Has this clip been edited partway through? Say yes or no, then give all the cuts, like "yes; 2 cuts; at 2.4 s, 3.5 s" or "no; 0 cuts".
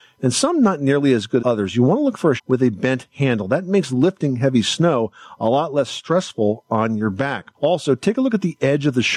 yes; 3 cuts; at 1.4 s, 2.4 s, 7.5 s